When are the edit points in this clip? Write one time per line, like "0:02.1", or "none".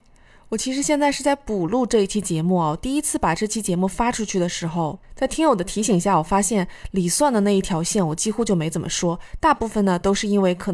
0:05.0